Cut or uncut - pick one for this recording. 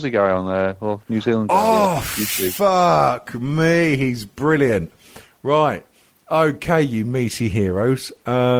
uncut